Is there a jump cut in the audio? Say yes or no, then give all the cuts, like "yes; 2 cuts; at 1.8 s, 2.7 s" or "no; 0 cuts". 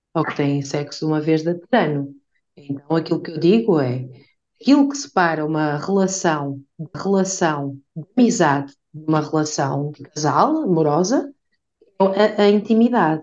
yes; 1 cut; at 6.9 s